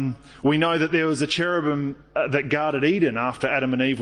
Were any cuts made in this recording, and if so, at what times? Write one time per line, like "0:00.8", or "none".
none

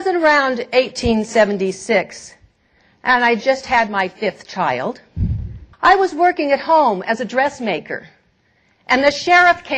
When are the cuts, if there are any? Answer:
0:05.7

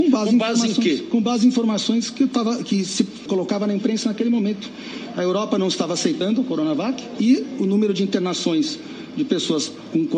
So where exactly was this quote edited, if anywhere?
0:03.3

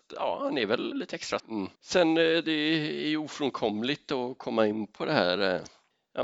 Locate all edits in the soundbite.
0:00.9
0:01.4
0:01.7

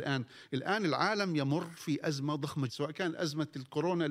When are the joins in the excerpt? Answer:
0:02.7

